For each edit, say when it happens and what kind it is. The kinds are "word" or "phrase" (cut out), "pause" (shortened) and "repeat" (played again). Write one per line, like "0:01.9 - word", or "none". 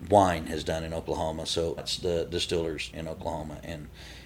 0:01.8 - word
0:02.9 - word